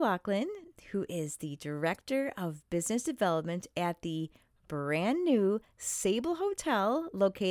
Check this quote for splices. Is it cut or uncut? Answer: uncut